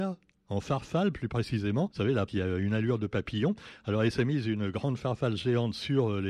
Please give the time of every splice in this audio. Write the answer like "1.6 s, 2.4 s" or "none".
1.9 s, 2.3 s